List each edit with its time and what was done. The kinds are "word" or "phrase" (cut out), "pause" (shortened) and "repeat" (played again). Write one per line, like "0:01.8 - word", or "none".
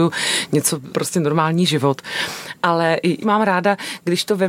0:00.9 - phrase
0:03.2 - word

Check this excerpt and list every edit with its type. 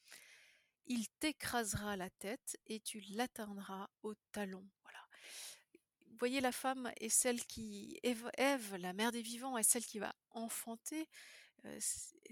0:03.9 - pause
0:04.8 - pause

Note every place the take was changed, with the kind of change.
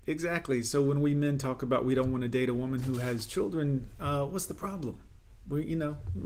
none

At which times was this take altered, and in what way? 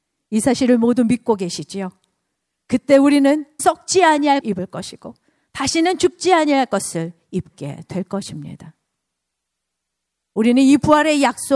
0:03.6 - word
0:04.4 - word

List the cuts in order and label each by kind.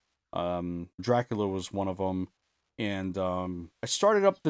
0:01.0 - word

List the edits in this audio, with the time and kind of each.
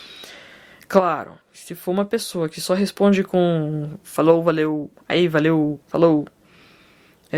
0:01.4 - pause
0:04.9 - pause
0:05.8 - pause

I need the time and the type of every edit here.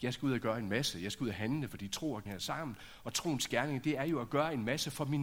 0:02.3 - word

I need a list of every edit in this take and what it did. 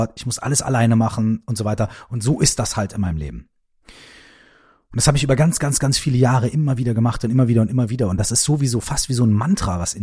none

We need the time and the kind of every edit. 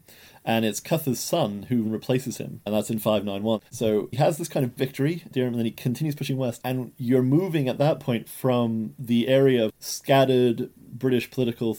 0:01.8 - word
0:03.7 - pause
0:04.8 - word

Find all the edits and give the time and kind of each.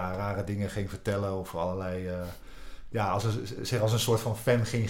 none

